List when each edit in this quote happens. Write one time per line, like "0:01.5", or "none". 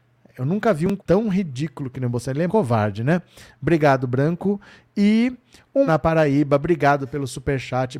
0:01.0
0:02.5
0:05.9